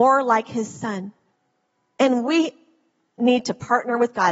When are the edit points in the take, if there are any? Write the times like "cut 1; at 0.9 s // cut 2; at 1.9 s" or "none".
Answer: cut 1; at 1.3 s